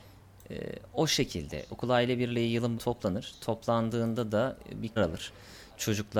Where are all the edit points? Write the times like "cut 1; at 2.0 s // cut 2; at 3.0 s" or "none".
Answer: cut 1; at 2.8 s // cut 2; at 5.0 s